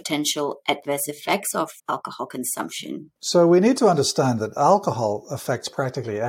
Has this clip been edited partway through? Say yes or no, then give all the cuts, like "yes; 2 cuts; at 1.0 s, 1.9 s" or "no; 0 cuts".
yes; 2 cuts; at 1.8 s, 3.2 s